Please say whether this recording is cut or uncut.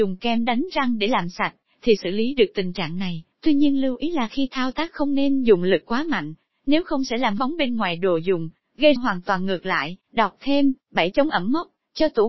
cut